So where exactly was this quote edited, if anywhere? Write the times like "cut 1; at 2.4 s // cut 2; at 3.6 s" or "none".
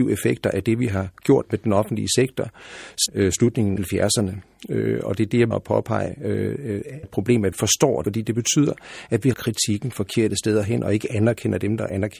cut 1; at 3.1 s // cut 2; at 3.8 s // cut 3; at 5.5 s // cut 4; at 7.0 s // cut 5; at 7.5 s // cut 6; at 8.0 s // cut 7; at 9.3 s